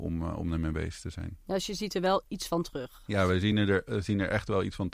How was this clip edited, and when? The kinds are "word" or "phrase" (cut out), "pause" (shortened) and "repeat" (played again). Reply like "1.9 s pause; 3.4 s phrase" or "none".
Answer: none